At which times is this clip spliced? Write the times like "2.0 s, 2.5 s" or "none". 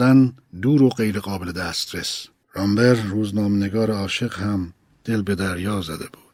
none